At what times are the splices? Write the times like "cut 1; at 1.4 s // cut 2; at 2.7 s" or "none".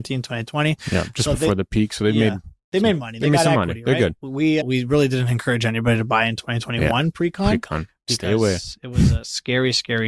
cut 1; at 4.6 s